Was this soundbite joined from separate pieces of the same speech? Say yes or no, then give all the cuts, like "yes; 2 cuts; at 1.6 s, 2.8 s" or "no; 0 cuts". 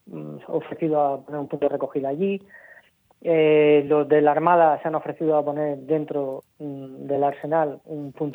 no; 0 cuts